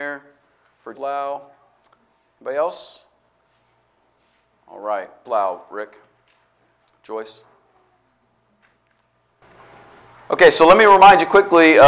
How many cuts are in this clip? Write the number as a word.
two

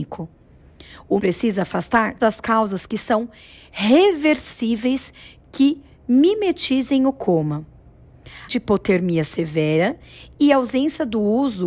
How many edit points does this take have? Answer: three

